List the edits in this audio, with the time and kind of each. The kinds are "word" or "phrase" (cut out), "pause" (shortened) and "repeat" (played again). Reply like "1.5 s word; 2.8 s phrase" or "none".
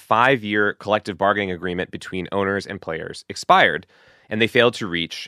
none